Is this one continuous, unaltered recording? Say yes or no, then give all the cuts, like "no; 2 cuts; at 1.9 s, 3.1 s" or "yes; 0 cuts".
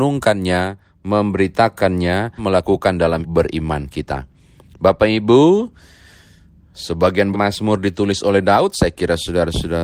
no; 3 cuts; at 2.4 s, 3.2 s, 7.3 s